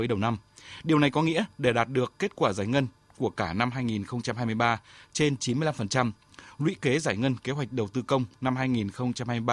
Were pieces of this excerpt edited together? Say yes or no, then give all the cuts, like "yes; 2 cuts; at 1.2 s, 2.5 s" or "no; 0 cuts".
no; 0 cuts